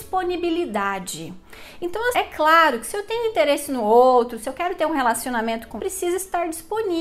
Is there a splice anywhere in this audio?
yes; 2 cuts; at 2.1 s, 5.8 s

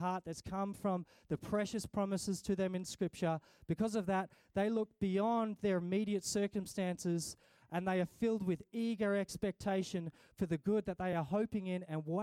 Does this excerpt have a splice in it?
no; 0 cuts

